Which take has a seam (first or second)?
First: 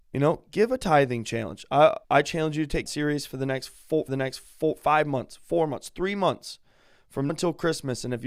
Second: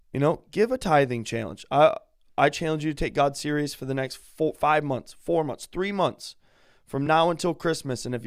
first